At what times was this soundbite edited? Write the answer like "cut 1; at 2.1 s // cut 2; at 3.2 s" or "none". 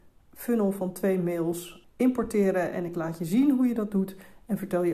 cut 1; at 1.8 s